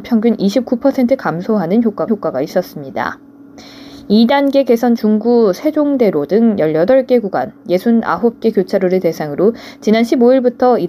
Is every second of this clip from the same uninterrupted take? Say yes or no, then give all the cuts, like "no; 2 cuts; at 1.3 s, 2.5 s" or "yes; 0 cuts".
no; 2 cuts; at 2.1 s, 5.0 s